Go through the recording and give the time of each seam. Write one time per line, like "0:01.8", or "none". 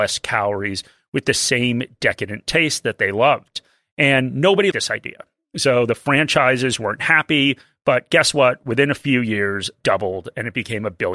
0:04.7
0:09.8